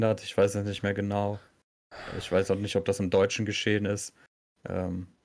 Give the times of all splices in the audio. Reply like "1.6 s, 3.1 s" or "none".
none